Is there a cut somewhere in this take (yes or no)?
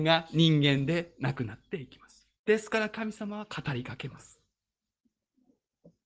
yes